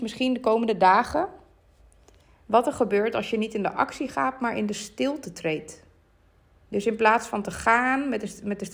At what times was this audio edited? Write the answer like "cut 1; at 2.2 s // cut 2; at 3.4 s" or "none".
cut 1; at 6.2 s